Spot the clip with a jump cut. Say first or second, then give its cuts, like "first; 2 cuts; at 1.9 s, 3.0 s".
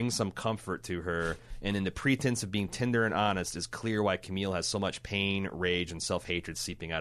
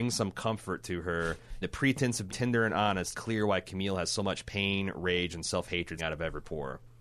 second; 4 cuts; at 1.6 s, 2.3 s, 3.1 s, 6.0 s